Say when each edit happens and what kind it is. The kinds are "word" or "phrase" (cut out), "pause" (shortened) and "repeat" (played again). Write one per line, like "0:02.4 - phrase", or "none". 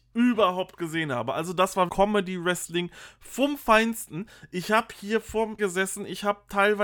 0:01.9 - word
0:05.6 - word